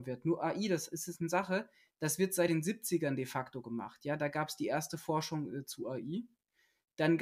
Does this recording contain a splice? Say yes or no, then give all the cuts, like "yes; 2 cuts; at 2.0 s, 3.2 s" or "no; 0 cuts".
no; 0 cuts